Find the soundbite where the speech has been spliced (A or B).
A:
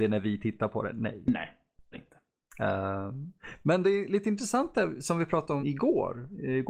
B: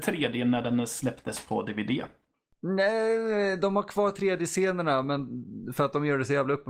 A